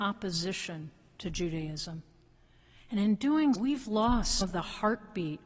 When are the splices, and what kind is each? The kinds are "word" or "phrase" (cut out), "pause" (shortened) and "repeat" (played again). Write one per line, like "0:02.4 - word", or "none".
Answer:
0:03.5 - word
0:04.4 - word